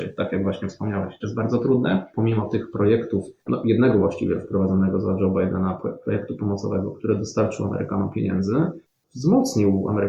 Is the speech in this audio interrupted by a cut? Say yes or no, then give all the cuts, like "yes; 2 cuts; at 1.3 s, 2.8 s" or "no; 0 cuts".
yes; 3 cuts; at 1.2 s, 2.1 s, 3.4 s